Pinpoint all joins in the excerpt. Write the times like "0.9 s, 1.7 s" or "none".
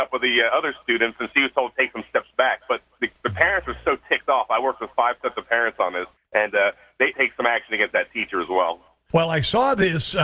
1.3 s, 6.2 s, 7.1 s